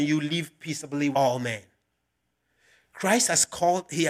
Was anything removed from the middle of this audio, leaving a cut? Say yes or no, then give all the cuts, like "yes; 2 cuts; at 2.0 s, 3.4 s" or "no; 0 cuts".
yes; 1 cut; at 1.1 s